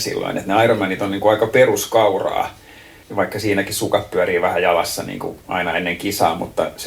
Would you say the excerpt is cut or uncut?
uncut